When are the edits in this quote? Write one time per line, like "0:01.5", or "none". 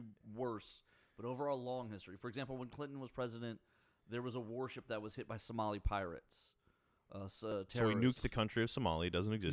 none